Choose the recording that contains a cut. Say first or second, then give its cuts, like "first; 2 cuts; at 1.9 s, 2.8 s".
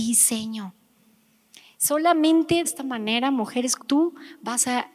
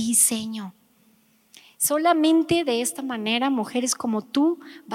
first; 2 cuts; at 2.6 s, 3.8 s